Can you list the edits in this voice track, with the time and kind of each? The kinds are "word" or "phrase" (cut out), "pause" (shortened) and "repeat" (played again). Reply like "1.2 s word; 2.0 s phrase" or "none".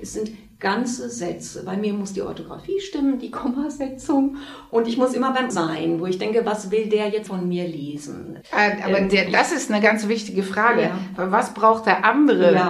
5.5 s word; 7.3 s word; 8.4 s pause